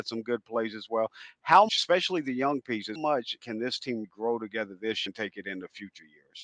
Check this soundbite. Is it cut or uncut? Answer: cut